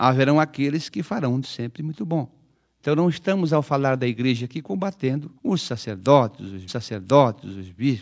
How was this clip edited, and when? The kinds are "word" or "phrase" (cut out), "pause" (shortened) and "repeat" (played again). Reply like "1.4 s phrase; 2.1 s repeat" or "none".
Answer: 1.4 s word; 2.5 s pause; 5.4 s pause; 6.7 s repeat